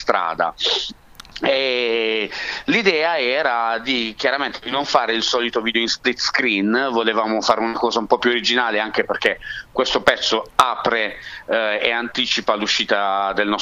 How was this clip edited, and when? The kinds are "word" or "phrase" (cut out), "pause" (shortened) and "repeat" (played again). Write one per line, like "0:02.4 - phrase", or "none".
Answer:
none